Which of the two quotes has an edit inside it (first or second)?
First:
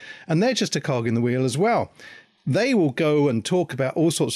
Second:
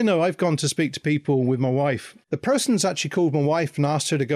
second